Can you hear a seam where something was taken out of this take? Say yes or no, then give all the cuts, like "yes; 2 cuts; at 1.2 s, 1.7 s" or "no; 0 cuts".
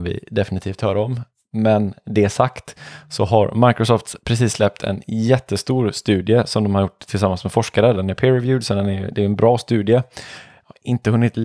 no; 0 cuts